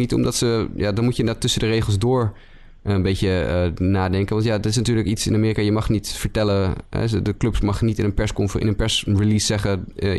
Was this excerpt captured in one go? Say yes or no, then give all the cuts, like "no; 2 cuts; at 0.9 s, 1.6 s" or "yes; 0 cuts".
yes; 0 cuts